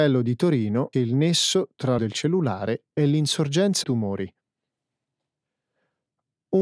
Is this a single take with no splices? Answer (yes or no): no